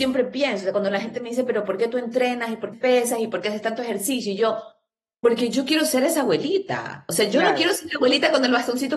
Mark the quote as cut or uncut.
cut